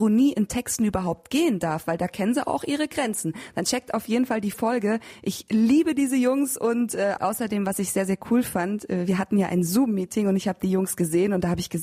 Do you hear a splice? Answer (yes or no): no